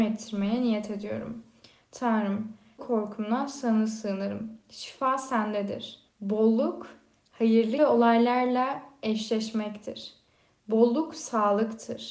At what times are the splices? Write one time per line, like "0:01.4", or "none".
0:02.8
0:06.1
0:07.8